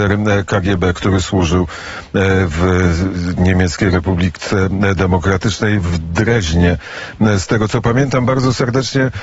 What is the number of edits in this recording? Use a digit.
0